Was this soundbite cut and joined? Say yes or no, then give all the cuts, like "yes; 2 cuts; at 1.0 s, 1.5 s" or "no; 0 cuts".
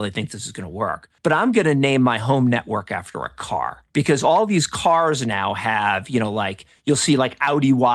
yes; 2 cuts; at 1.2 s, 3.9 s